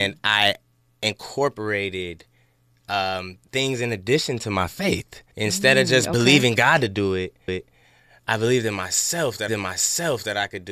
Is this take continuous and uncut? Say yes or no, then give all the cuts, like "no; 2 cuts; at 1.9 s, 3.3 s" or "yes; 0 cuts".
no; 3 cuts; at 5.3 s, 7.5 s, 9.5 s